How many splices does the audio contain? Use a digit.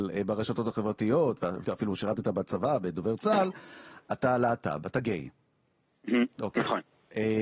2